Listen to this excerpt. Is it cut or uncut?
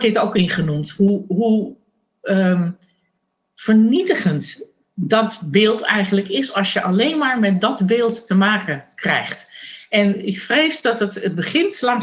uncut